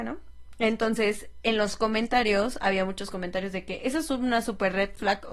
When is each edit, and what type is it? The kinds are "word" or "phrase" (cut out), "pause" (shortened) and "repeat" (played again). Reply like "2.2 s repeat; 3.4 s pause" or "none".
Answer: none